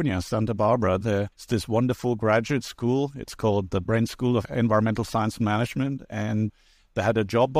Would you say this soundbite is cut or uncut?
cut